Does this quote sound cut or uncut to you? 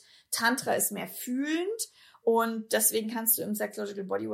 uncut